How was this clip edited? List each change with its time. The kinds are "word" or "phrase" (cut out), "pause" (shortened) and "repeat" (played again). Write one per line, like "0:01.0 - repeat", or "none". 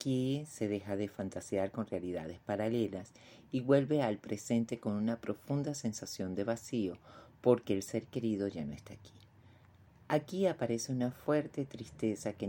none